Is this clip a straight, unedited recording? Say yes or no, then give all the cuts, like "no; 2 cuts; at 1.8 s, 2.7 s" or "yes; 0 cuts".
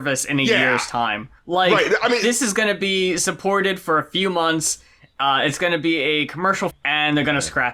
no; 2 cuts; at 1.4 s, 6.7 s